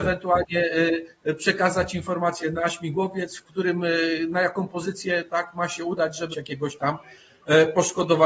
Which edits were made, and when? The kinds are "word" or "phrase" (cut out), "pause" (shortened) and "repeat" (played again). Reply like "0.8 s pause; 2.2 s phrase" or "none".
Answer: 6.3 s phrase